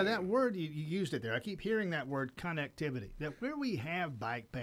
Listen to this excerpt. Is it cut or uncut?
uncut